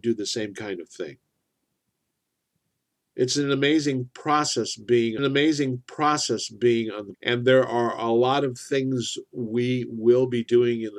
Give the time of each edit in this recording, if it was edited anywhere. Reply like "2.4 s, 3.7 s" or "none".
5.2 s, 7.1 s